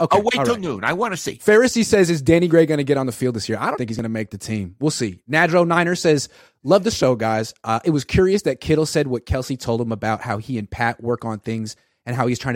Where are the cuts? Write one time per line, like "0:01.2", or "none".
0:03.8